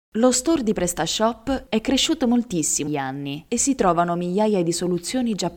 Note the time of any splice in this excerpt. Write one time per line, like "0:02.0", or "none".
0:02.9